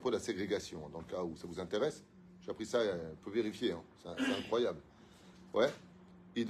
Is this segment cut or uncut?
uncut